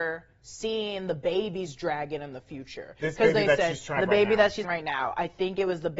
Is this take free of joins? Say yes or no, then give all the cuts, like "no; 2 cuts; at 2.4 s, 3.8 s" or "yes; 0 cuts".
no; 2 cuts; at 4.0 s, 4.6 s